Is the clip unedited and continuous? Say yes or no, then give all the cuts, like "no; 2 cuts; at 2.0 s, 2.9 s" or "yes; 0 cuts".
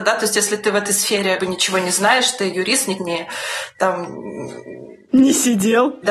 no; 3 cuts; at 1.4 s, 2.5 s, 3.0 s